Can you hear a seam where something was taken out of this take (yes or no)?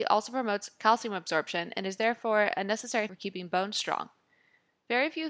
yes